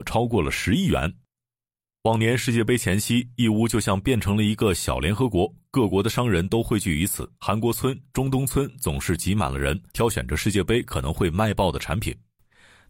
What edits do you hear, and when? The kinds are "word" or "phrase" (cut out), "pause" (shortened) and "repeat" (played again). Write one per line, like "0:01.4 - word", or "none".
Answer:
0:07.4 - pause
0:09.9 - pause